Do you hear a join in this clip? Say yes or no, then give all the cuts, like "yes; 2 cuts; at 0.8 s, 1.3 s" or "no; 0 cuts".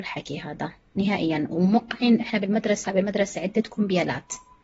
yes; 1 cut; at 2.8 s